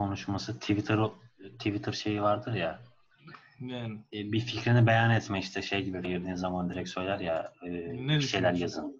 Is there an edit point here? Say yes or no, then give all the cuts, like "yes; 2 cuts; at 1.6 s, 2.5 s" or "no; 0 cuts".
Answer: yes; 1 cut; at 6.0 s